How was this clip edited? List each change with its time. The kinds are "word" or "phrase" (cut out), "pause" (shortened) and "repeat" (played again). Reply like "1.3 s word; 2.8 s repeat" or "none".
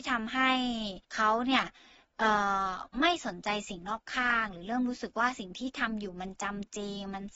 1.0 s pause